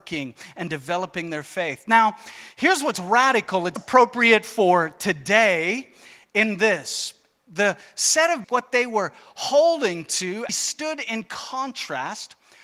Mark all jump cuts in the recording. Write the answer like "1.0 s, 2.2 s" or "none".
3.8 s, 8.4 s, 10.5 s